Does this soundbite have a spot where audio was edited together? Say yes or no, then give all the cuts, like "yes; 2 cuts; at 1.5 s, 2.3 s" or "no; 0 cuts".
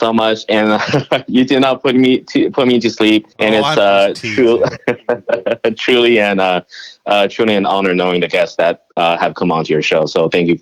yes; 1 cut; at 3.3 s